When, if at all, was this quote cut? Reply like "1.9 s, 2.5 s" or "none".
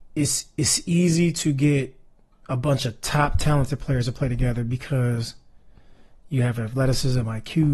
none